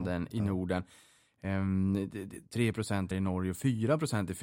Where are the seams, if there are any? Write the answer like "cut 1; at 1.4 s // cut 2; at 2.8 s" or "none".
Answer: cut 1; at 2.4 s // cut 2; at 3.1 s

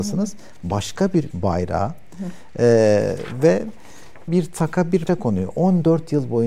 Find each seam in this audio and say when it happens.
cut 1; at 1.3 s // cut 2; at 4.3 s // cut 3; at 5.1 s

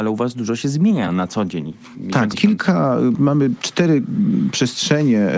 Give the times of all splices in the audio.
cut 1; at 1.1 s // cut 2; at 2.3 s // cut 3; at 3.1 s

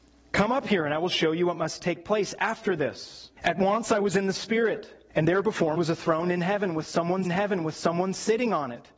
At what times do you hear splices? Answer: cut 1; at 3.4 s // cut 2; at 5.1 s // cut 3; at 5.8 s // cut 4; at 7.3 s

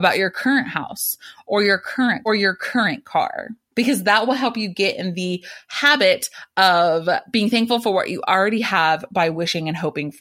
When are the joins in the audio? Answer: cut 1; at 2.3 s // cut 2; at 3.7 s

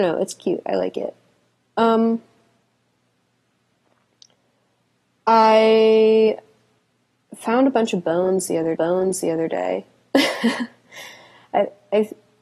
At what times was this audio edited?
cut 1; at 8.8 s

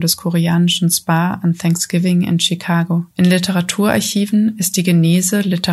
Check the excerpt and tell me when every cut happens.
cut 1; at 3.1 s

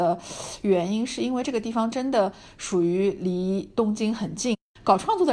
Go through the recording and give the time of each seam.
none

